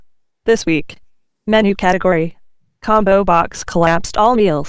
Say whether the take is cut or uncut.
uncut